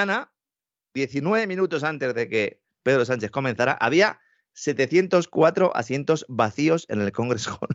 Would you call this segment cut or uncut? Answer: uncut